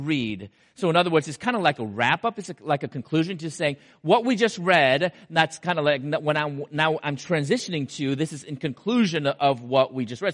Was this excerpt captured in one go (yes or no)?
yes